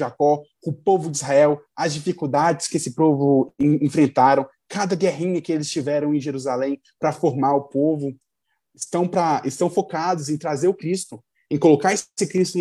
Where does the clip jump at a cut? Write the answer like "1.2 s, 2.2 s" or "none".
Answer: none